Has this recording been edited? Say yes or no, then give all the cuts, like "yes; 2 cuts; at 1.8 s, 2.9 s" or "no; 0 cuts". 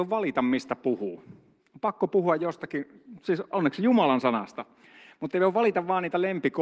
no; 0 cuts